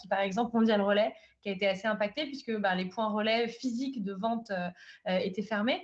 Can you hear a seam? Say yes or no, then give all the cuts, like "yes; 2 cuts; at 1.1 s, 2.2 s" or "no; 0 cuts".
no; 0 cuts